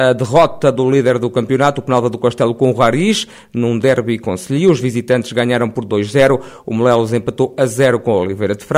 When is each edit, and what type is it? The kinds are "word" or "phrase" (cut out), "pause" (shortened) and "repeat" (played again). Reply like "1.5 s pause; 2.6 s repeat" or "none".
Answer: none